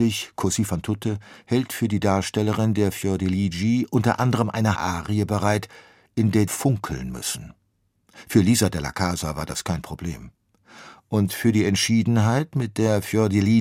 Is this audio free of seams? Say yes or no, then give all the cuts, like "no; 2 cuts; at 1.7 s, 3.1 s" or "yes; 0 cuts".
no; 2 cuts; at 4.8 s, 6.5 s